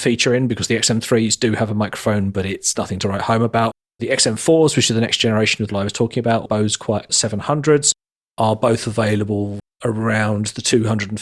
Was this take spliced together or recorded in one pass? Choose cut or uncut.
cut